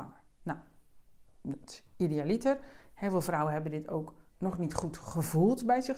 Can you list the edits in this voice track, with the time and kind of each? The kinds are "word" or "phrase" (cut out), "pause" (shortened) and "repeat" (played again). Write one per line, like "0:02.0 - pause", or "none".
0:04.3 - pause

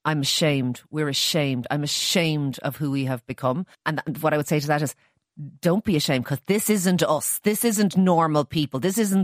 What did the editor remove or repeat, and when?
0:03.7 - pause

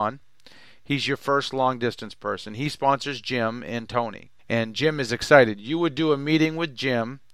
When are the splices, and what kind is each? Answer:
0:04.4 - pause

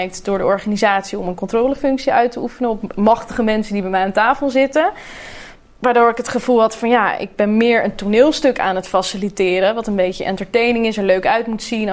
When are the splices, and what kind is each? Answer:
none

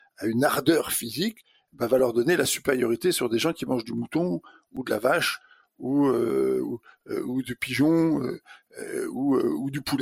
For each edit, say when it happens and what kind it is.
none

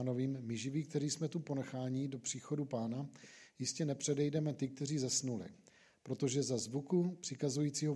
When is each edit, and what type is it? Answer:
none

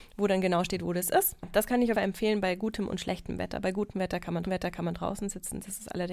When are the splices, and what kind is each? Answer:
0:01.9 - phrase
0:04.5 - repeat

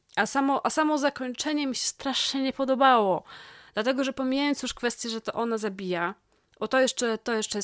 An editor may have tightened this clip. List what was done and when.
none

